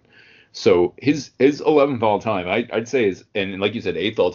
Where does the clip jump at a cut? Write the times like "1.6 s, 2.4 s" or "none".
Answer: none